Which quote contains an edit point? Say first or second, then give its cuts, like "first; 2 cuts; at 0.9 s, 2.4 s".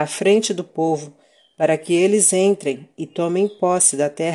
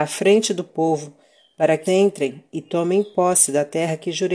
second; 1 cut; at 1.9 s